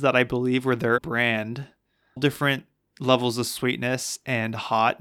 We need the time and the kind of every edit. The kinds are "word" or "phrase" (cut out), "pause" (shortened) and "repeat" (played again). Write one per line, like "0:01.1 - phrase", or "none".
0:01.0 - word
0:02.2 - word